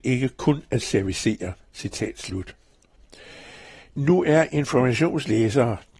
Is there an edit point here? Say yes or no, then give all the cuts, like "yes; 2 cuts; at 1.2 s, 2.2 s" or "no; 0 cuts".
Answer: no; 0 cuts